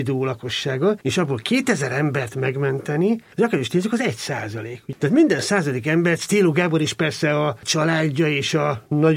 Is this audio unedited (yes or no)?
no